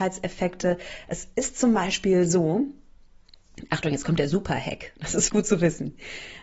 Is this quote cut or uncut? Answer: cut